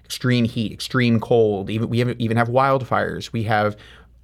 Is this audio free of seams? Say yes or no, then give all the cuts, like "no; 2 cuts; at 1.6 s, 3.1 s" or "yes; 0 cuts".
yes; 0 cuts